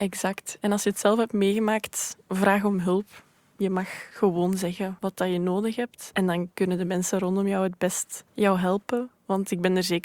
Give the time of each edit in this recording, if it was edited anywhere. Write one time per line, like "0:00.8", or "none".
0:02.2
0:08.3